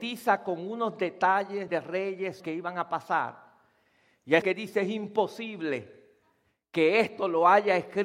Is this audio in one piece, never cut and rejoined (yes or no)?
no